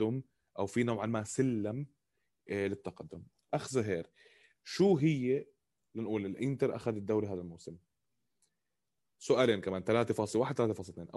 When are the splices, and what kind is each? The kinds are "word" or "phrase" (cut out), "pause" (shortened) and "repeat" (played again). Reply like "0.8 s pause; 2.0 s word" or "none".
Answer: none